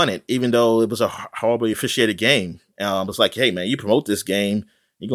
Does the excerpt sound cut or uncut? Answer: uncut